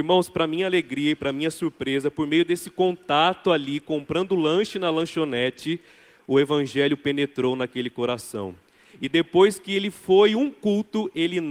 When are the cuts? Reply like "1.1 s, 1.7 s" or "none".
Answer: none